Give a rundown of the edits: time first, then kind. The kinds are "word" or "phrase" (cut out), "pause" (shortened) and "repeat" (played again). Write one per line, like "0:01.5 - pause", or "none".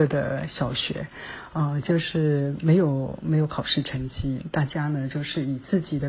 none